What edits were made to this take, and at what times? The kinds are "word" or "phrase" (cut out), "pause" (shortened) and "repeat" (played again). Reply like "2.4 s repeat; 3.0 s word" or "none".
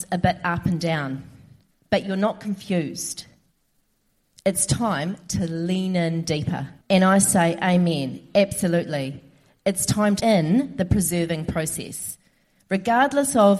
1.7 s pause; 6.8 s pause; 10.2 s word

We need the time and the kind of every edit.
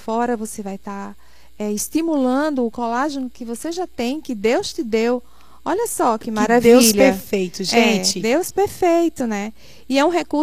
none

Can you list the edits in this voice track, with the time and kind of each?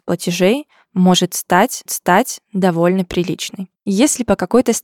1.9 s repeat; 3.7 s pause

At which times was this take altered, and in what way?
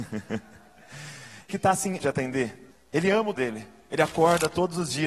1.5 s phrase; 2.0 s phrase; 2.7 s pause; 3.3 s word

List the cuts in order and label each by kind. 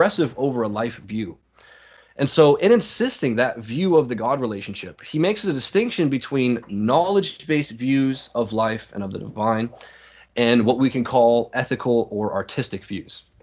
none

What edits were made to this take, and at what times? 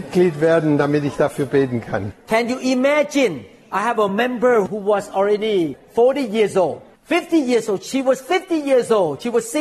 none

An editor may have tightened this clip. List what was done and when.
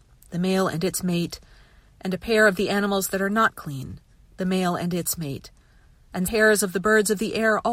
6.2 s word

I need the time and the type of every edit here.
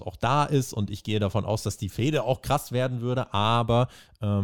none

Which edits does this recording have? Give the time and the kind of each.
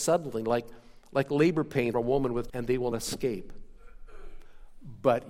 1.9 s word; 2.5 s word; 2.9 s word

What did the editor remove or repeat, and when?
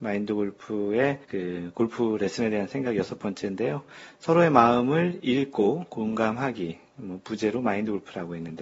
1.2 s pause

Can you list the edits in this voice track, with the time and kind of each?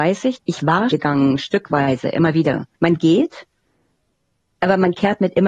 0.9 s word; 2.7 s pause

